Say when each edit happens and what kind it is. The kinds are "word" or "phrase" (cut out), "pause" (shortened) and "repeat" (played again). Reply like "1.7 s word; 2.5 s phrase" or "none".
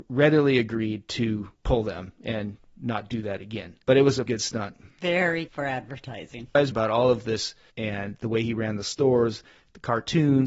1.6 s pause; 3.8 s pause; 4.3 s word; 5.5 s word; 6.7 s phrase; 7.7 s word